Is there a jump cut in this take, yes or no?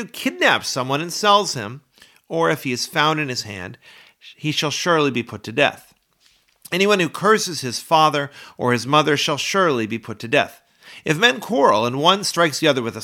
no